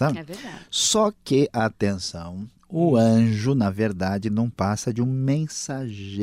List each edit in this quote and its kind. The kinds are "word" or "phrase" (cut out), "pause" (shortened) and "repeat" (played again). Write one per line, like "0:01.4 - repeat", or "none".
none